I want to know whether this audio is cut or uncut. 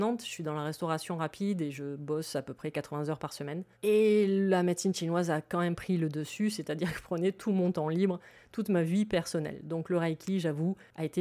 cut